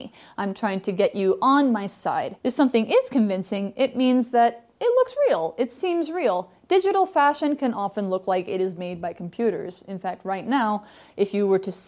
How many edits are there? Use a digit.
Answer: 1